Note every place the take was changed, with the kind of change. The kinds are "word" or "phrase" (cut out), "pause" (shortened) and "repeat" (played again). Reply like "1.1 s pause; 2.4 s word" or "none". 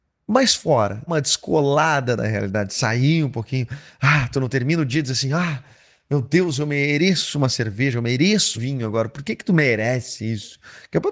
1.1 s word; 8.5 s word